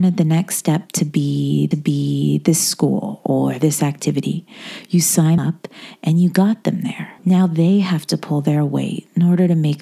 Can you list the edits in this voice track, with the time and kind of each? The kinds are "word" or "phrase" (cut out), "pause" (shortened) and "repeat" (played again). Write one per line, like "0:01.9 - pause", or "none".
0:01.7 - repeat
0:05.4 - word
0:07.2 - pause